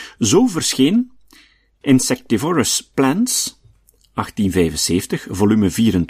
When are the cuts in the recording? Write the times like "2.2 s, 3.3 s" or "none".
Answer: none